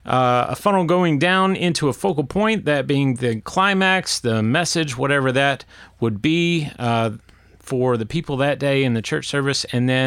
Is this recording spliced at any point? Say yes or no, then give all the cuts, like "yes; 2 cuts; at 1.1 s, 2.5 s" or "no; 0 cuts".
yes; 1 cut; at 3.2 s